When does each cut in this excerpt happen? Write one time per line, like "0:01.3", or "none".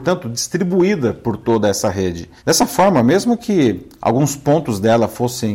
0:02.4